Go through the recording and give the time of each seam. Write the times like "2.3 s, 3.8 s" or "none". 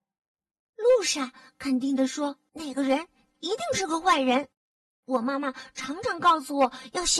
2.5 s